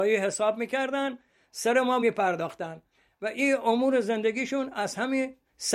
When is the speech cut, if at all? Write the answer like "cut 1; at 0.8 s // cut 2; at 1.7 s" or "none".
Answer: cut 1; at 2.0 s